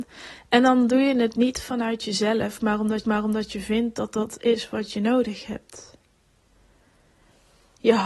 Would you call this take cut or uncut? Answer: cut